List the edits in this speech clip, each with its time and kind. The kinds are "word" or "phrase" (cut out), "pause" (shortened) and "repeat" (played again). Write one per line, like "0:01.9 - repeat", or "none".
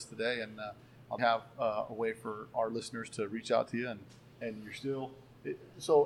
0:01.2 - word
0:04.4 - word